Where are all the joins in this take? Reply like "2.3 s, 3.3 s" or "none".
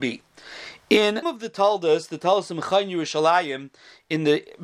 1.2 s